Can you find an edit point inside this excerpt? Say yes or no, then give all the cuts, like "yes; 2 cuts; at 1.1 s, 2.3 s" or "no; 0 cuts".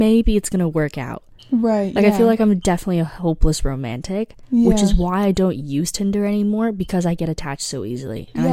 no; 0 cuts